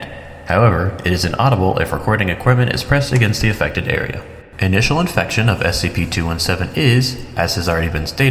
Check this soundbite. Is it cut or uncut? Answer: uncut